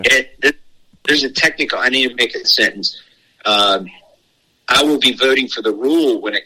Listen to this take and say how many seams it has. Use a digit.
1